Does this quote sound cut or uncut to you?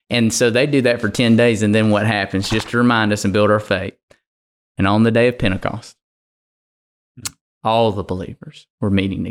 uncut